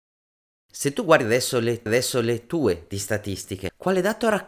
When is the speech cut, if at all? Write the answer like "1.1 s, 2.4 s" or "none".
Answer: 1.9 s

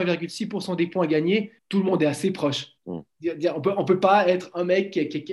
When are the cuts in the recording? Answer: 1.6 s, 2.8 s

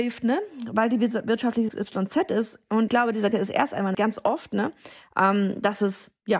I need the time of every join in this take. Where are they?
1.7 s, 2.9 s, 3.3 s, 3.9 s

